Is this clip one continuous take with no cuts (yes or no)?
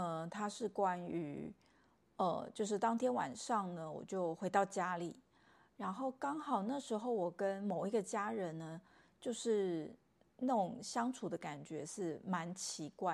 yes